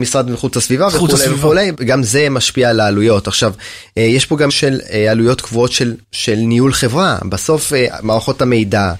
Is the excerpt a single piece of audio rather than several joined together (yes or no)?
no